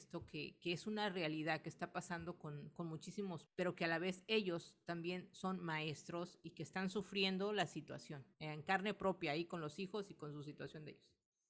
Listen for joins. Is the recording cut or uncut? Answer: cut